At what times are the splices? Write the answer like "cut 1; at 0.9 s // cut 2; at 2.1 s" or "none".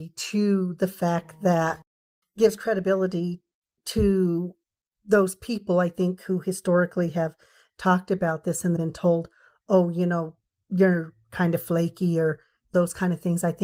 cut 1; at 8.8 s